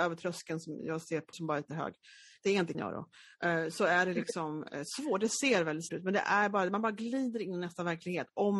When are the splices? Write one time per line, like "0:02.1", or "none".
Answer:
0:01.3
0:01.7
0:02.7
0:05.9

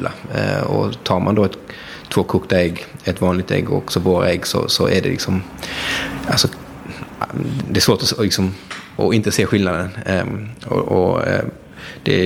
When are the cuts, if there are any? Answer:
none

